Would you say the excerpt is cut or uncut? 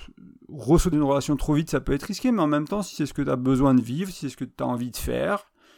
cut